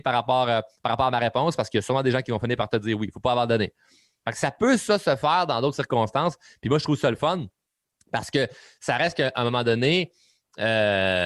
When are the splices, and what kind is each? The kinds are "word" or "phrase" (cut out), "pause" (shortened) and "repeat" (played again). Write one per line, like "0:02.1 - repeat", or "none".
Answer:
none